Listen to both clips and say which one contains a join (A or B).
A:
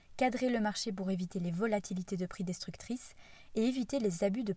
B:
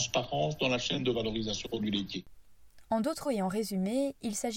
B